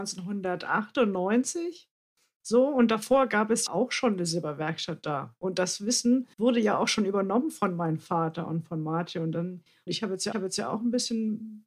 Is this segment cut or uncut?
cut